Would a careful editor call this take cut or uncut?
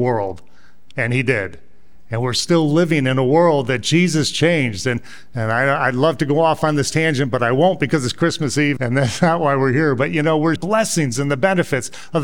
cut